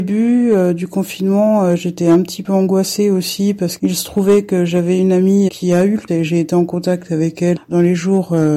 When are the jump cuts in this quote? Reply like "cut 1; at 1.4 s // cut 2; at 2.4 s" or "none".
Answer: cut 1; at 3.8 s // cut 2; at 5.5 s // cut 3; at 6.1 s // cut 4; at 7.6 s